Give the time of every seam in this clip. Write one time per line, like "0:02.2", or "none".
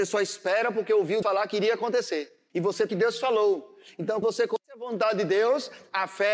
0:01.2
0:02.5
0:02.9
0:04.2
0:04.6